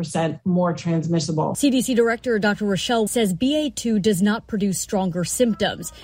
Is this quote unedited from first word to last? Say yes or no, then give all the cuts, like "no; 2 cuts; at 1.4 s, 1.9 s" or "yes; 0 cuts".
no; 1 cut; at 3.1 s